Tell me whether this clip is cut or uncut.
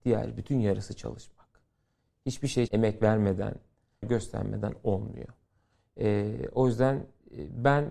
cut